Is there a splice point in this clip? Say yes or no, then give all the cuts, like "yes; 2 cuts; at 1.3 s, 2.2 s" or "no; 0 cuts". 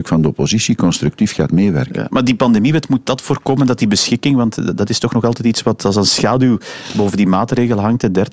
no; 0 cuts